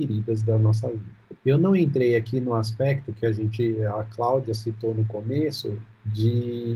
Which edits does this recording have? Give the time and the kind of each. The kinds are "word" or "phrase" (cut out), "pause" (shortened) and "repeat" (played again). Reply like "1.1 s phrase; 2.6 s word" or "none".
1.4 s pause